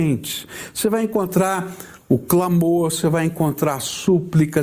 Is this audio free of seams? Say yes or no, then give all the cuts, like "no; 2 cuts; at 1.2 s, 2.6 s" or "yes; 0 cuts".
yes; 0 cuts